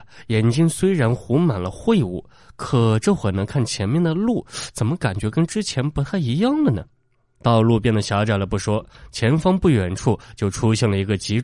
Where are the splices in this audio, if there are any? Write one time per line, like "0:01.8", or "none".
none